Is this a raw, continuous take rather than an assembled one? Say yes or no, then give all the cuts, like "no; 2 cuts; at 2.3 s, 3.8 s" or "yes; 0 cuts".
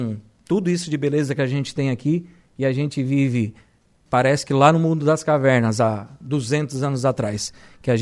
yes; 0 cuts